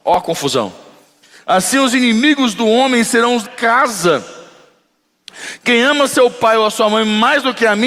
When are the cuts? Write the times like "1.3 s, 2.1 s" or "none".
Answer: 3.4 s